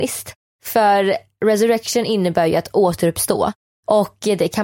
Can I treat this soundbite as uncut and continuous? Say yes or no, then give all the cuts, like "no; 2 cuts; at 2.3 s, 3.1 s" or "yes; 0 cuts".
yes; 0 cuts